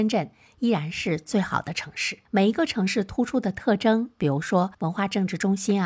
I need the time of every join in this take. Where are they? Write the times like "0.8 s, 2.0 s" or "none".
2.2 s, 4.7 s